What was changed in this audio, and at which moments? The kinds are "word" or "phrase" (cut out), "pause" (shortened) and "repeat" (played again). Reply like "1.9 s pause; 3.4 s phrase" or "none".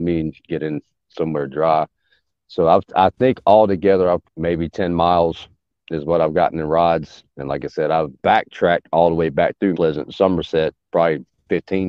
4.2 s word; 8.2 s word; 9.7 s word

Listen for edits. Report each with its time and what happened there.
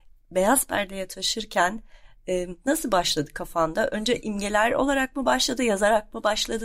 2.6 s pause; 5.6 s word

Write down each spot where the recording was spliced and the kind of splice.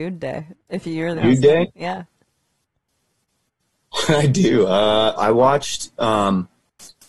1.2 s phrase; 5.2 s word

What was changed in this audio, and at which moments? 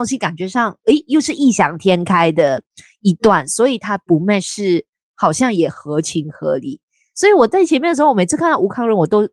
none

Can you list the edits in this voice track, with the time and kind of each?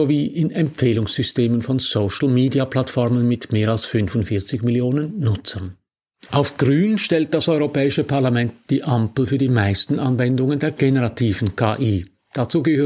none

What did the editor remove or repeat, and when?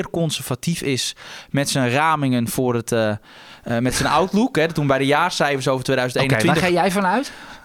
none

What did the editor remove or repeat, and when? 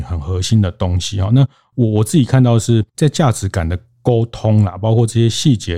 2.9 s pause

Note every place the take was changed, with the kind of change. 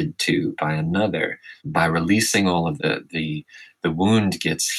1.6 s pause; 2.8 s word

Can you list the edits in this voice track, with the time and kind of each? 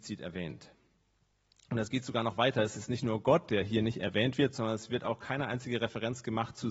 none

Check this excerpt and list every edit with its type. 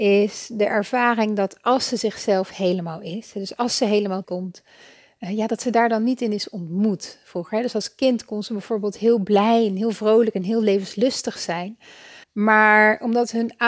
4.2 s word; 12.2 s pause

